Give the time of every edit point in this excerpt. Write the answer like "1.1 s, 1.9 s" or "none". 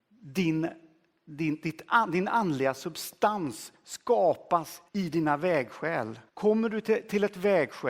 4.9 s, 6.3 s

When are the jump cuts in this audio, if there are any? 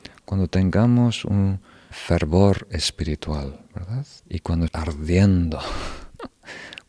1.9 s, 4.2 s, 4.7 s

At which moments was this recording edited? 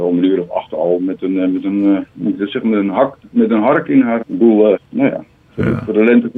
2.1 s, 4.2 s, 4.7 s

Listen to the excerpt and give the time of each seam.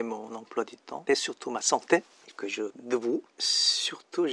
1.1 s, 2.3 s, 2.7 s

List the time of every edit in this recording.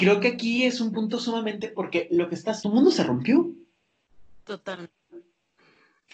1.6 s, 2.6 s

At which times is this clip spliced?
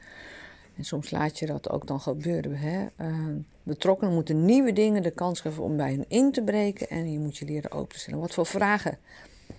3.5 s

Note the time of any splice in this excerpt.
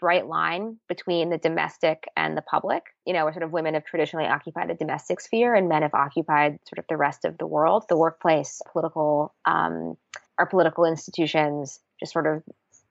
3.0 s, 8.7 s, 10.3 s

